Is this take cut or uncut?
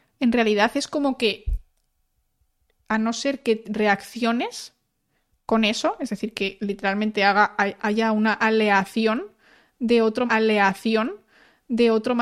cut